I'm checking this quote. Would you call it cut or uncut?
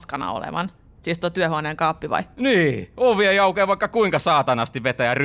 uncut